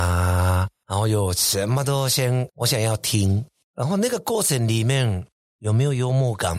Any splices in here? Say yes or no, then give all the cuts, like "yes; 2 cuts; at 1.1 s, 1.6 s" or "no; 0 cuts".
yes; 1 cut; at 2.5 s